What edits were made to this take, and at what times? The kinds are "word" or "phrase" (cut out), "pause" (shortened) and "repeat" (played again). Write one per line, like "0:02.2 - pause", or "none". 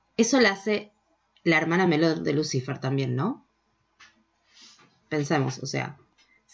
none